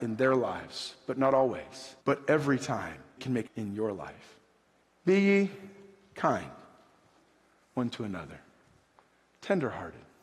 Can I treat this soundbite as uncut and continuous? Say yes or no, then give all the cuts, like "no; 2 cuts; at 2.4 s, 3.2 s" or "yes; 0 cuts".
no; 4 cuts; at 2.0 s, 3.2 s, 3.5 s, 4.8 s